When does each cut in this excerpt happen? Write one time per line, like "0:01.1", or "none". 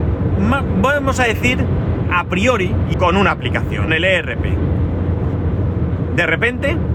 0:02.0
0:02.9
0:03.9